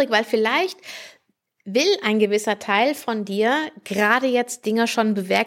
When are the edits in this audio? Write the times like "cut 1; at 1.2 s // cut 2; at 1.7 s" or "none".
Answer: none